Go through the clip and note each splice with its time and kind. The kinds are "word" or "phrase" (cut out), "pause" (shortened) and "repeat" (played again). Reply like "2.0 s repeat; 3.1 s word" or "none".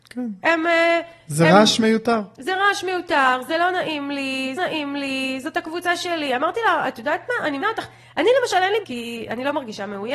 4.6 s repeat; 7.6 s word; 8.8 s phrase